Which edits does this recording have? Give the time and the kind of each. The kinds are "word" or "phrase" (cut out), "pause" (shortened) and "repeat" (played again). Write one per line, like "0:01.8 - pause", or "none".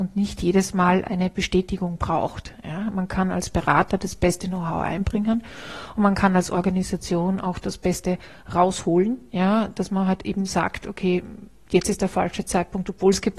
none